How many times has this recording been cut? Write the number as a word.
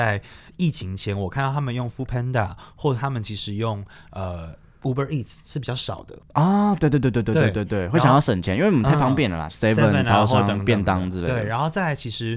one